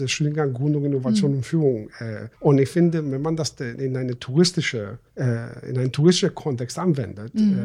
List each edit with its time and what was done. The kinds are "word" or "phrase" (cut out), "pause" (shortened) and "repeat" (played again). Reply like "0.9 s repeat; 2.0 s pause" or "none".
2.3 s pause; 5.1 s pause